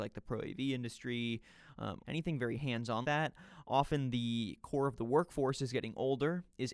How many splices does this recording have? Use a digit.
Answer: 2